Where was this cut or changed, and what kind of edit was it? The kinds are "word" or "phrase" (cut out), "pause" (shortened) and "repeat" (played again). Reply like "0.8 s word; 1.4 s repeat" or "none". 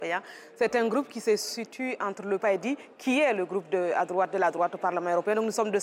2.4 s phrase